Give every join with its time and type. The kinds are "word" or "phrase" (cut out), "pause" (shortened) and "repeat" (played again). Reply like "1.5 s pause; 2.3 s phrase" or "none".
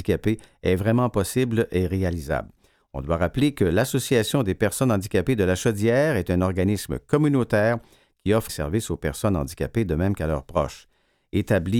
8.5 s word